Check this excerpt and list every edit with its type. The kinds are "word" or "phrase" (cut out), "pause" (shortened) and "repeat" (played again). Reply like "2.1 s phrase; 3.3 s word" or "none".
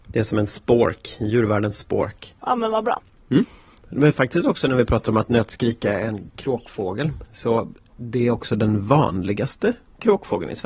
2.4 s pause